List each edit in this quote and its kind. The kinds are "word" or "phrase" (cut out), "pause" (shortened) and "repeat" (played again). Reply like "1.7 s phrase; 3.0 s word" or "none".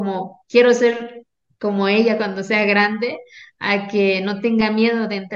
none